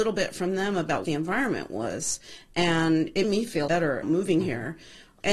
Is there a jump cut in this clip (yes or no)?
yes